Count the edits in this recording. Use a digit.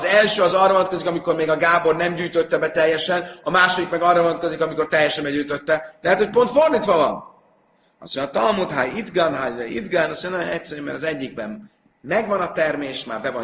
0